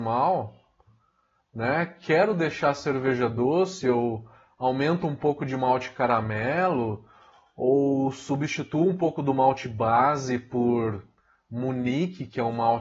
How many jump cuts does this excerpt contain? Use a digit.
0